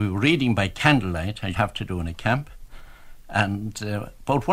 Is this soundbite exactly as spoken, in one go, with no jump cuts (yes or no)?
no